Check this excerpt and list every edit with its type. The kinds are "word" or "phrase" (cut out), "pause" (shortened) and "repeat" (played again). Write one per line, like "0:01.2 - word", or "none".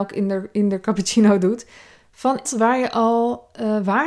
0:02.5 - word